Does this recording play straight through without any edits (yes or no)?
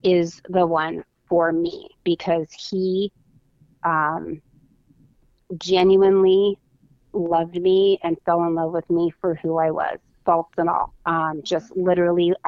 yes